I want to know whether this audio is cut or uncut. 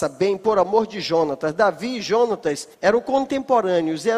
cut